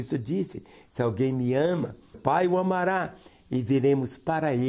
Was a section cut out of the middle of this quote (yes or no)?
yes